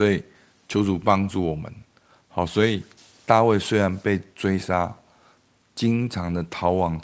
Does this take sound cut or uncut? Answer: uncut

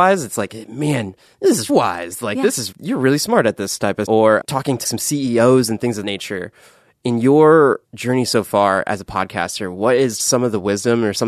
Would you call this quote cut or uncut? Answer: cut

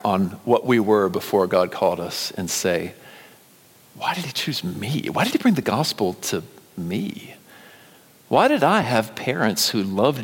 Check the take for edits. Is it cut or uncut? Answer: uncut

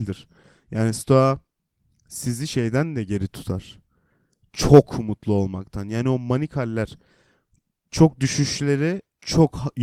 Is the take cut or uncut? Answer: uncut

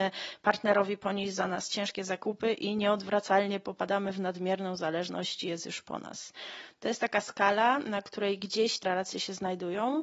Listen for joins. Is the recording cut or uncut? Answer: cut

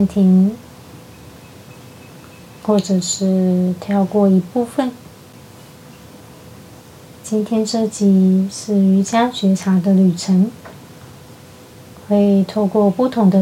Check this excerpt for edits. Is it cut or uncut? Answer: uncut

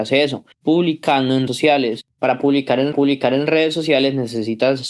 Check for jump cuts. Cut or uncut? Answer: cut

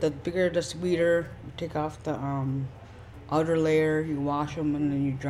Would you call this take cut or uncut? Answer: uncut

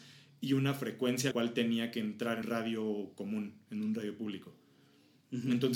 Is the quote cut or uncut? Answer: cut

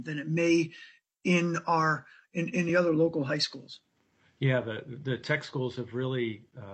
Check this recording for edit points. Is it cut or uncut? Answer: uncut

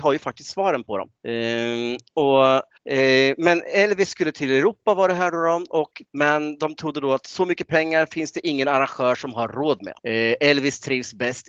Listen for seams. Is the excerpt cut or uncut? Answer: cut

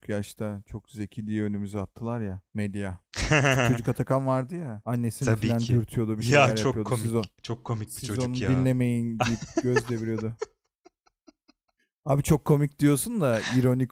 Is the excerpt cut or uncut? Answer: uncut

